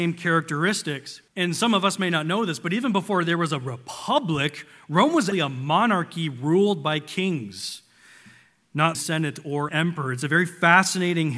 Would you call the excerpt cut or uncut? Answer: cut